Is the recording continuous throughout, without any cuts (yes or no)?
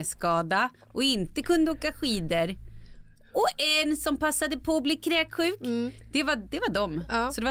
yes